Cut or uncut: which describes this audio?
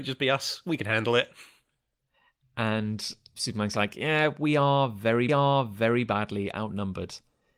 cut